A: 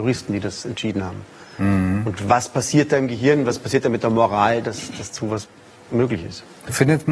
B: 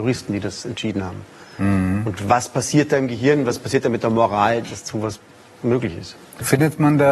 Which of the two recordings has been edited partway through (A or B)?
B